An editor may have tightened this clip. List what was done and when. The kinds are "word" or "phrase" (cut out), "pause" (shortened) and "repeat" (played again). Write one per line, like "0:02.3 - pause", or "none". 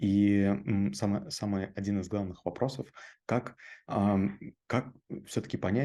none